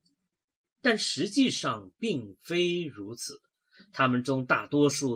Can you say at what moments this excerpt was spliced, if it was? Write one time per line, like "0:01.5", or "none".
none